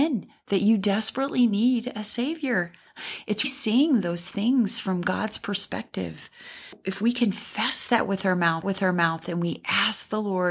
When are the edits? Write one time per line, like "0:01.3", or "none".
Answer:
0:03.4
0:08.6